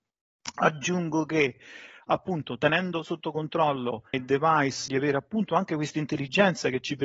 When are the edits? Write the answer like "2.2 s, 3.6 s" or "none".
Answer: 4.1 s, 4.9 s